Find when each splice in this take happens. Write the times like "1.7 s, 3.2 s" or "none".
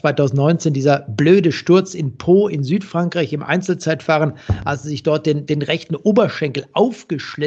none